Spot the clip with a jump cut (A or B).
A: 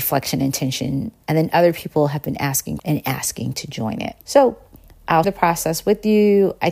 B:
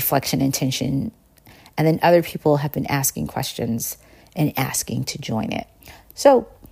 A